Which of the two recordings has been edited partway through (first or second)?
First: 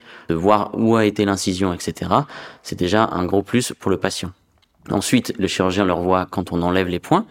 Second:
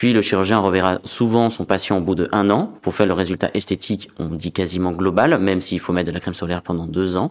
second